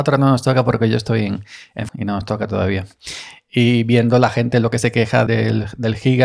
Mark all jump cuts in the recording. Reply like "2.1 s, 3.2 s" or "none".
1.9 s, 5.3 s